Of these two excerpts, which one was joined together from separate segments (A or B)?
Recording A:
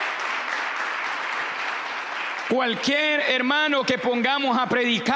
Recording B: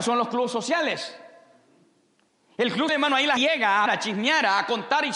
B